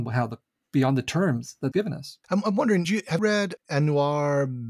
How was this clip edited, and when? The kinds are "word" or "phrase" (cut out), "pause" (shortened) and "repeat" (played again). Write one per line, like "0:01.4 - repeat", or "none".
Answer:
0:01.7 - phrase
0:02.2 - pause
0:02.8 - word
0:03.2 - word
0:03.6 - word